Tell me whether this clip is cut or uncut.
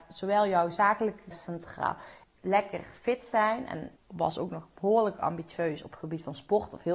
cut